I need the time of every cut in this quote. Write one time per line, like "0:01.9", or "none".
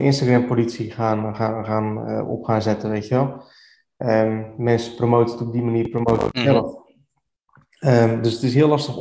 none